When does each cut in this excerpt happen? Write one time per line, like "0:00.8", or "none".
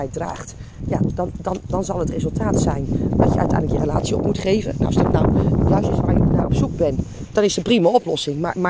0:07.3